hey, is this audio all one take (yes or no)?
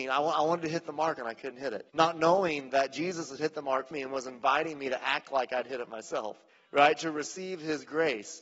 no